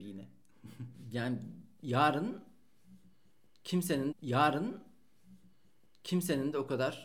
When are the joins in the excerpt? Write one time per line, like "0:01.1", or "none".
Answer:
0:04.1